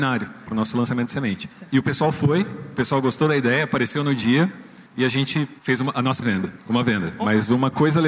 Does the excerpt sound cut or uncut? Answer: cut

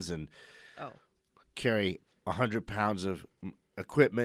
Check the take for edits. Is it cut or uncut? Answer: uncut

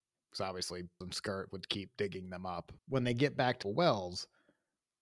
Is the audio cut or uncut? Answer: cut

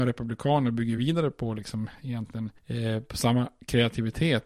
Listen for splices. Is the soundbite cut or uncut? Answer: uncut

